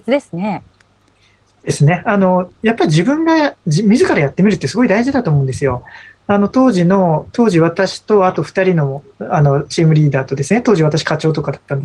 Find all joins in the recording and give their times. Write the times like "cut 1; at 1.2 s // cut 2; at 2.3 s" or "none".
cut 1; at 3.6 s